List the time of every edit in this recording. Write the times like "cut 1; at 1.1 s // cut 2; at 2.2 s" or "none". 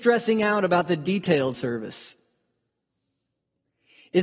cut 1; at 1.5 s